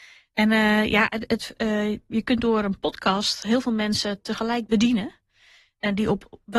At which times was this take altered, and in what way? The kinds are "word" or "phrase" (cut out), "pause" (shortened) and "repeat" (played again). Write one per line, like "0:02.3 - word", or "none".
none

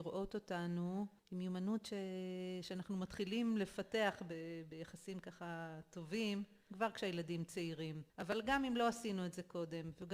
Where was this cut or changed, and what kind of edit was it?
0:01.2 - pause
0:08.1 - pause

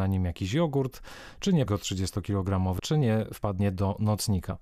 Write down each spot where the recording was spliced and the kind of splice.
0:01.7 - word
0:02.8 - word

